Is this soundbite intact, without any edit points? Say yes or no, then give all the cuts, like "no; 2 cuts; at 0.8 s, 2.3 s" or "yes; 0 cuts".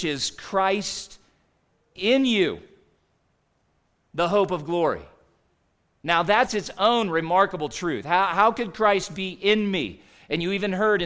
yes; 0 cuts